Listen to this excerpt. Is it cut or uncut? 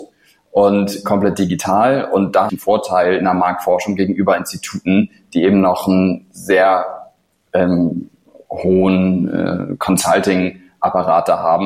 cut